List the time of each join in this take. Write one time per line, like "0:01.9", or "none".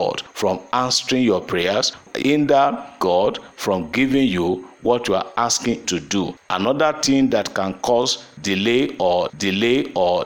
0:02.2
0:05.8
0:09.3